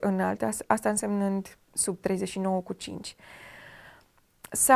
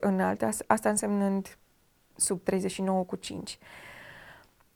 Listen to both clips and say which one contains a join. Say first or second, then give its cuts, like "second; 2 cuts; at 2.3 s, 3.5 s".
first; 1 cut; at 1.6 s